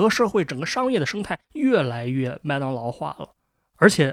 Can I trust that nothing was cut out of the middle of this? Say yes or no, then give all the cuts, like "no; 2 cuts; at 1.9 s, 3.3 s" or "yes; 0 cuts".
no; 1 cut; at 1.4 s